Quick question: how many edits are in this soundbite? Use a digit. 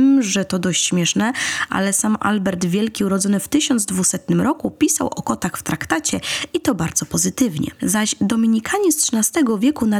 0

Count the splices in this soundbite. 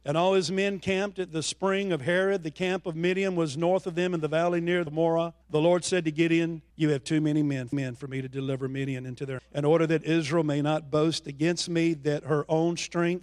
5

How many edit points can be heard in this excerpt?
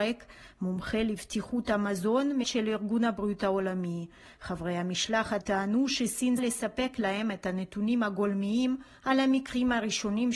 3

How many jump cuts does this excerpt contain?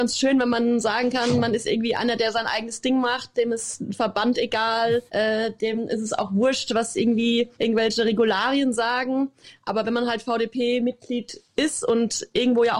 2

